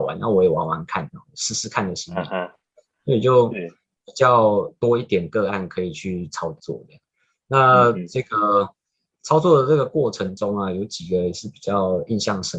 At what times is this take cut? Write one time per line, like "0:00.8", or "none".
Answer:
none